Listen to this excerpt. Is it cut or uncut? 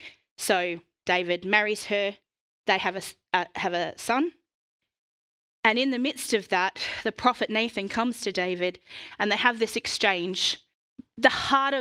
uncut